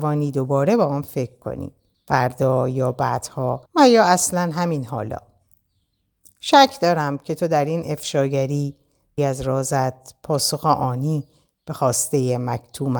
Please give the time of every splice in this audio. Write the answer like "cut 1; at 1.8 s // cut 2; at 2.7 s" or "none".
cut 1; at 1.9 s // cut 2; at 3.7 s // cut 3; at 9.2 s